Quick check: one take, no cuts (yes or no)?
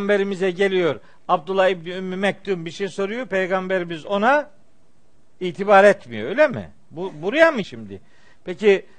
no